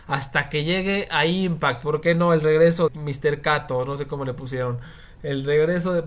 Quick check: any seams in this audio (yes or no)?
yes